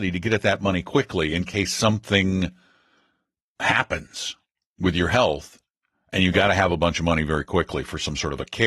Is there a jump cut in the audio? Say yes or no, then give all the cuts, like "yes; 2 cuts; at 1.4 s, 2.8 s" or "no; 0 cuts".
no; 0 cuts